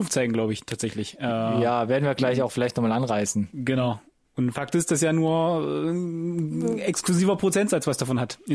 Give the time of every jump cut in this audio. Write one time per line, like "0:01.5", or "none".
none